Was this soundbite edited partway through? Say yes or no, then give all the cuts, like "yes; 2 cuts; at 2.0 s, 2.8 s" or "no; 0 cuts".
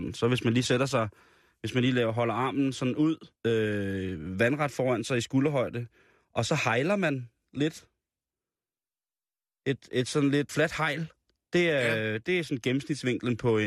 yes; 2 cuts; at 3.4 s, 10.5 s